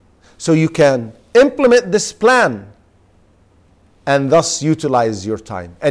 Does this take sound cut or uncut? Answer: uncut